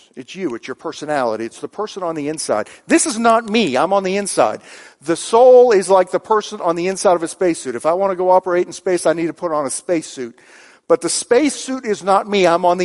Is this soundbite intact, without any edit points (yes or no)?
yes